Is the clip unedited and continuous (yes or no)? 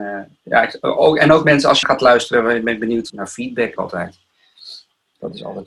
no